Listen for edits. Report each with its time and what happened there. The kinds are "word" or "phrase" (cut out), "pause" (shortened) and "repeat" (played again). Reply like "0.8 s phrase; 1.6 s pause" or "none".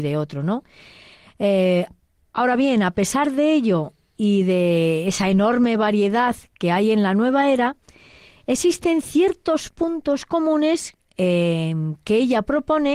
none